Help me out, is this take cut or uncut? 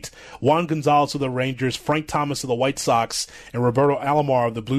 uncut